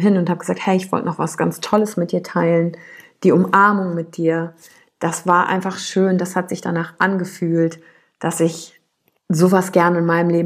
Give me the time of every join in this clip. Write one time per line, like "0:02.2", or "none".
none